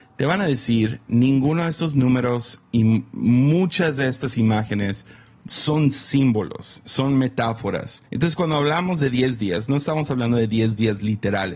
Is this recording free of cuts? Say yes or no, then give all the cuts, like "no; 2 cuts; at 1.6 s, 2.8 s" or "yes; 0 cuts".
no; 1 cut; at 8.1 s